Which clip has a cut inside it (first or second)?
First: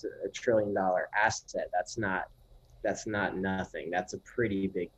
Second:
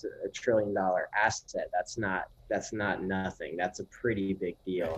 second